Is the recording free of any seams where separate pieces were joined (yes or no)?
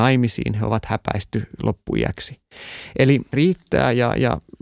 no